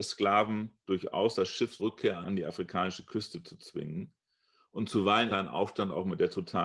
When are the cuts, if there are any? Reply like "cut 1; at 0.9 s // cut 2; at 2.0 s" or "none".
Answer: cut 1; at 1.8 s // cut 2; at 5.3 s